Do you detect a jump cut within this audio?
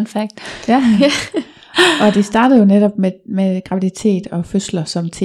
no; 0 cuts

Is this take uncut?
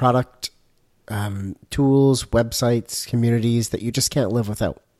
yes; 0 cuts

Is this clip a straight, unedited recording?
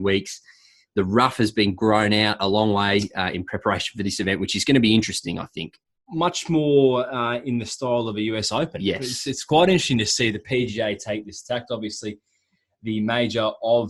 yes; 0 cuts

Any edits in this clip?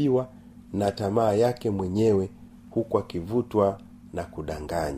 no; 0 cuts

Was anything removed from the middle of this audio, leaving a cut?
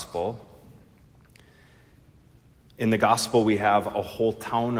no; 0 cuts

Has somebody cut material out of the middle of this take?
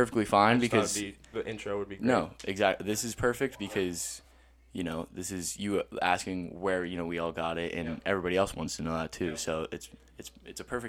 no; 0 cuts

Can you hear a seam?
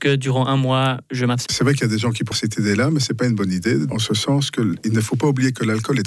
yes; 2 cuts; at 1.5 s, 2.3 s

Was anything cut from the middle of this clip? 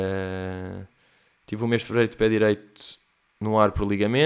no; 0 cuts

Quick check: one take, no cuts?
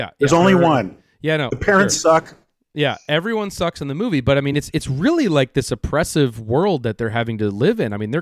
yes; 0 cuts

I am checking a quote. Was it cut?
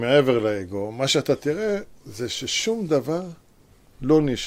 no; 0 cuts

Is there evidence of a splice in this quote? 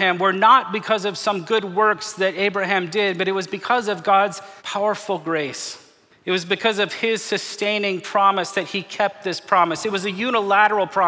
yes; 2 cuts; at 4.6 s, 6.1 s

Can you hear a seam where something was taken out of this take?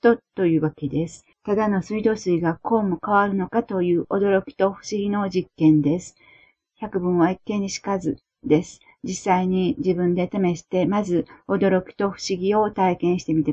yes; 1 cut; at 1.3 s

